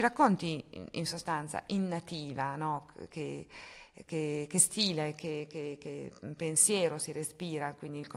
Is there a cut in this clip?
yes; 1 cut; at 4.1 s

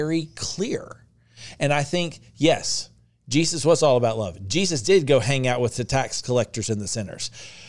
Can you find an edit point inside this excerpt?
no; 0 cuts

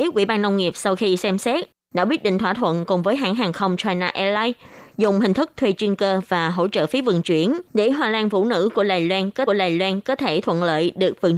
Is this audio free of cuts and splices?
no; 2 cuts; at 7.7 s, 9.5 s

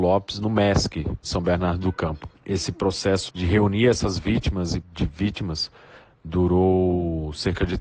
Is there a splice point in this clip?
yes; 4 cuts; at 1.2 s, 2.4 s, 3.3 s, 4.8 s

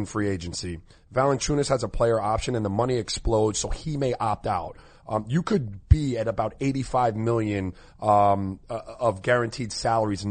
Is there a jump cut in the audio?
no; 0 cuts

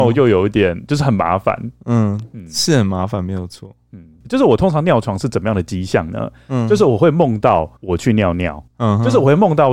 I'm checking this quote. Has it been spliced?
yes; 2 cuts; at 7.8 s, 8.7 s

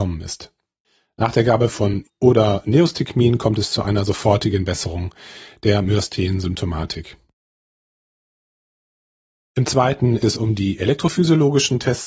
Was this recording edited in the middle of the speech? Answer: yes; 2 cuts; at 2.0 s, 10.2 s

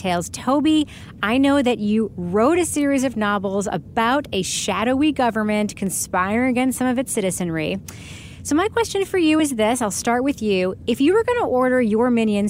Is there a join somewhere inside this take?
no; 0 cuts

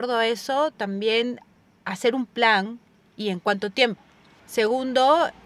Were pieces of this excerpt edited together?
no; 0 cuts

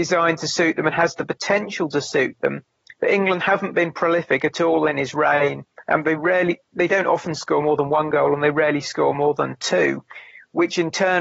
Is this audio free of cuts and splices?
yes; 0 cuts

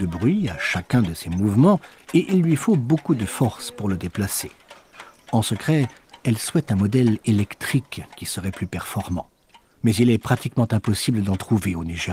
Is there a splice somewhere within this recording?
no; 0 cuts

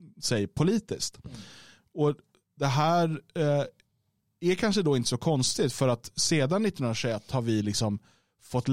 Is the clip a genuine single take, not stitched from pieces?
yes; 0 cuts

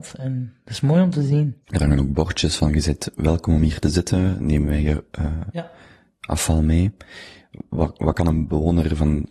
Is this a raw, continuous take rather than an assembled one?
no; 1 cut; at 1.6 s

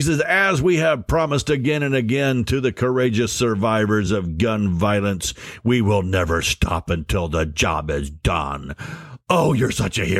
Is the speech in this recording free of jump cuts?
yes; 0 cuts

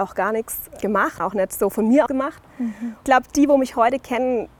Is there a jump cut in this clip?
yes; 3 cuts; at 1.2 s, 2.1 s, 3.0 s

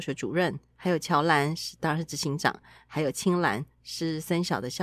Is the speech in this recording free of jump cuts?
yes; 0 cuts

